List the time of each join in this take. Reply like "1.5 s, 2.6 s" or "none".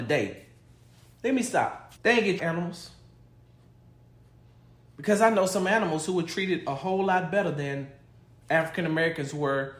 2.0 s, 2.4 s

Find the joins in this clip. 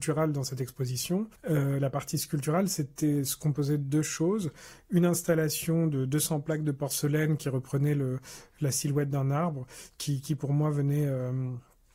1.4 s

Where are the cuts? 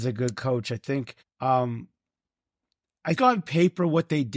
1.2 s, 3.2 s

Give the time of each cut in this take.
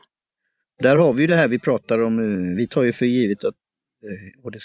none

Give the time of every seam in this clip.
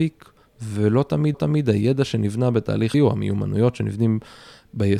1.3 s, 2.9 s

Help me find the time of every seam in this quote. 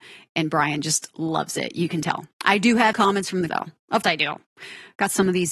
2.3 s, 2.9 s, 3.5 s, 4.0 s

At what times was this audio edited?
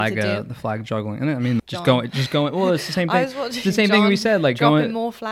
1.6 s

